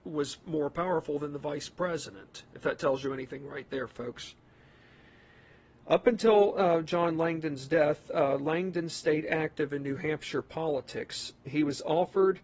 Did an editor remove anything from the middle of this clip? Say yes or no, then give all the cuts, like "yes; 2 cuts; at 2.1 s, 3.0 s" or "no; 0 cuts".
no; 0 cuts